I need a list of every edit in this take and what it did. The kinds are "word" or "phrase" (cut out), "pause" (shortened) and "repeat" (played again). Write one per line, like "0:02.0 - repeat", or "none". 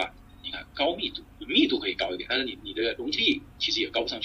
0:01.3 - pause